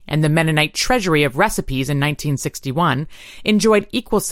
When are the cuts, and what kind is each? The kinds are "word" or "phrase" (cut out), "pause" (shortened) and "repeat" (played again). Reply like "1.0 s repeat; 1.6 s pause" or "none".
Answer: none

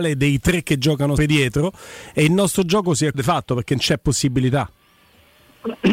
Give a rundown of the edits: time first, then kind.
1.2 s word; 3.1 s phrase

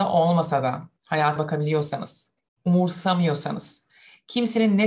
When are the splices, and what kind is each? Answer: 1.4 s word

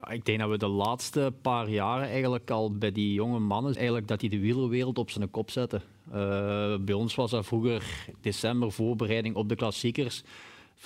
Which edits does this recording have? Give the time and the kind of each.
3.7 s word

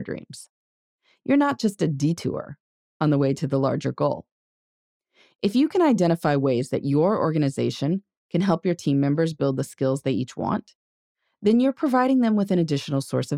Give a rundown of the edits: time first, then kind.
none

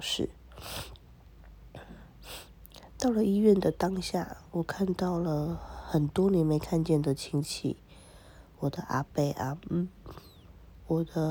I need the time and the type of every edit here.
none

